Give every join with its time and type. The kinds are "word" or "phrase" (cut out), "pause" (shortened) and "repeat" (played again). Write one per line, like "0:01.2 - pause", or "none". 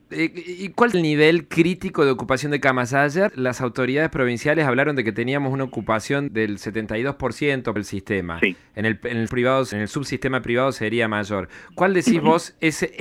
0:00.9 - word
0:03.3 - word
0:06.3 - word
0:07.8 - word
0:09.3 - word
0:09.7 - word